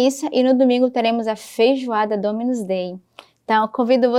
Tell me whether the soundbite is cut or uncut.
uncut